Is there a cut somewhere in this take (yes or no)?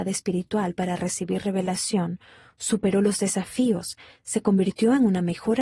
no